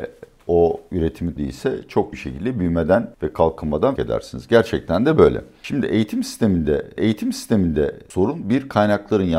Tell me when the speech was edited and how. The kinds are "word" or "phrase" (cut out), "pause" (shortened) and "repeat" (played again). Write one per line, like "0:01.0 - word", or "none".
0:01.4 - phrase
0:02.1 - word
0:03.1 - pause
0:04.0 - word
0:07.0 - repeat